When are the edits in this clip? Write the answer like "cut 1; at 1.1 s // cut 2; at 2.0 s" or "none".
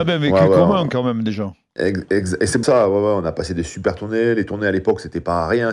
cut 1; at 2.6 s